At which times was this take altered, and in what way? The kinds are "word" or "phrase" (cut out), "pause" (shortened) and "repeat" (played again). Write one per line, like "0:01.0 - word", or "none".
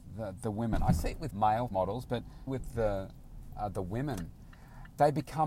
0:01.3 - word
0:01.7 - word
0:02.5 - word